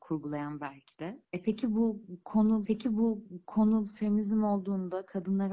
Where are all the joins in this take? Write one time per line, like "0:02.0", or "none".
0:02.6